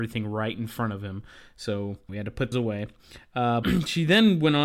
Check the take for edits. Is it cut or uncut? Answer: cut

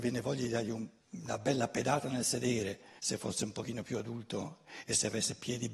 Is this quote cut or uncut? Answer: cut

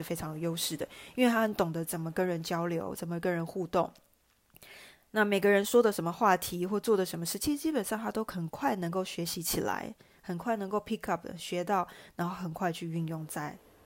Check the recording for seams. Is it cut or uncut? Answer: uncut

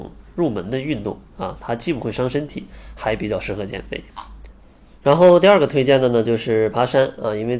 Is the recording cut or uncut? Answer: uncut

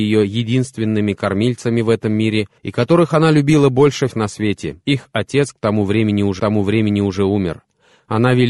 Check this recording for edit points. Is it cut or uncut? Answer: cut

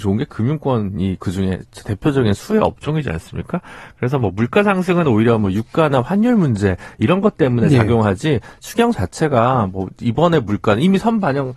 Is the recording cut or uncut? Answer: uncut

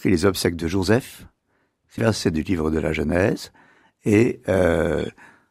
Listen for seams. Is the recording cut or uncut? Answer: cut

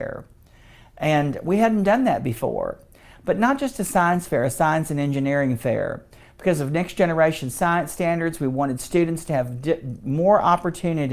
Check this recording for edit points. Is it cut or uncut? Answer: uncut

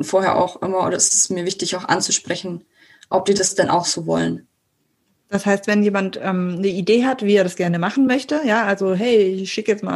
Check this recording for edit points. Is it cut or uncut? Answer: uncut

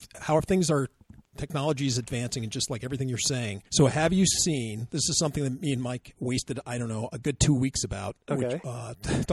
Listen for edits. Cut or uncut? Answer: cut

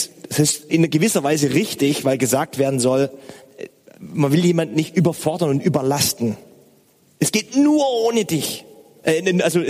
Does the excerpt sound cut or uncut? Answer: uncut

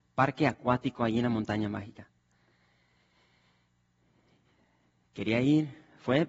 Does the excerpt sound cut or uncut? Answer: uncut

